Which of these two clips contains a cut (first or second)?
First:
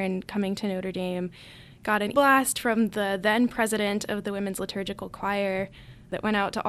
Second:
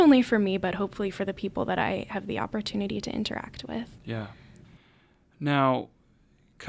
first